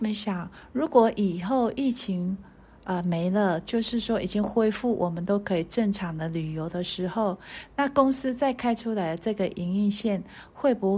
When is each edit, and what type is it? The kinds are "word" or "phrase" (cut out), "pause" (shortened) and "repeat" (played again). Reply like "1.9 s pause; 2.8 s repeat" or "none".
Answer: none